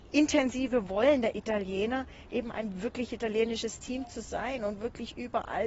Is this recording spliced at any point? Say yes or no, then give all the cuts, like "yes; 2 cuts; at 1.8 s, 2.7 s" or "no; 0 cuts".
no; 0 cuts